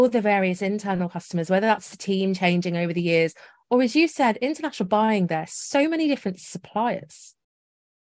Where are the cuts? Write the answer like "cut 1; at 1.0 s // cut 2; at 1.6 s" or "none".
none